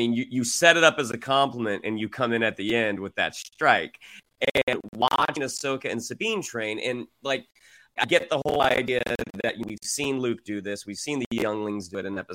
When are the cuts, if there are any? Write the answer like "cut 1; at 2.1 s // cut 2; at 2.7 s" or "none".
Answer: cut 1; at 8.0 s